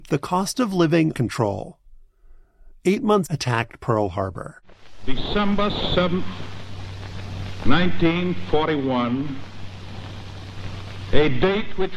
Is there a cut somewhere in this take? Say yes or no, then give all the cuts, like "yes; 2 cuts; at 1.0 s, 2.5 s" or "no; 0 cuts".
yes; 2 cuts; at 1.1 s, 3.3 s